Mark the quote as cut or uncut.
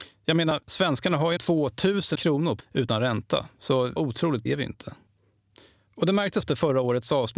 cut